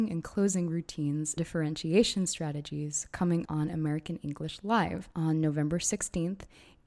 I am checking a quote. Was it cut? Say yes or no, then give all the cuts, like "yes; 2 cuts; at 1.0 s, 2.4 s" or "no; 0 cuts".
yes; 3 cuts; at 1.4 s, 3.4 s, 5.1 s